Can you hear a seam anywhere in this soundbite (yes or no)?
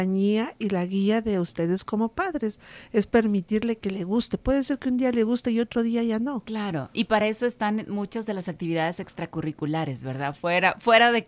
no